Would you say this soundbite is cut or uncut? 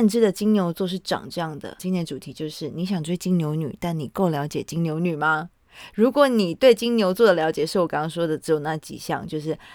cut